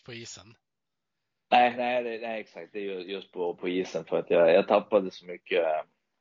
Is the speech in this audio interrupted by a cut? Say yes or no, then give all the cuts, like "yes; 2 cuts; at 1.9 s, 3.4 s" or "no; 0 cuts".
no; 0 cuts